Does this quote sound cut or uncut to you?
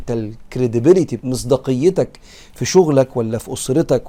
cut